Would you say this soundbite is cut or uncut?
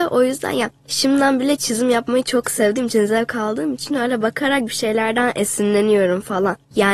uncut